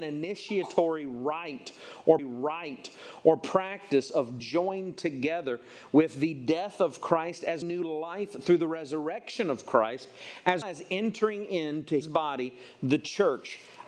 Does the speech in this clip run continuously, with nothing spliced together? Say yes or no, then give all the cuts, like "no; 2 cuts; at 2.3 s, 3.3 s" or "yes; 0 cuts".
no; 5 cuts; at 2.2 s, 4.4 s, 7.6 s, 10.6 s, 12.0 s